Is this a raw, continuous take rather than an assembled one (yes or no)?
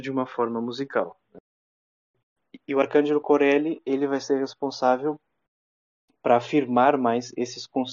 yes